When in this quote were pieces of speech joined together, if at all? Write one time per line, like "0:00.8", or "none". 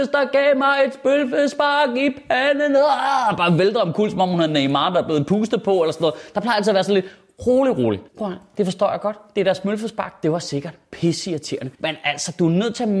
0:08.1
0:11.7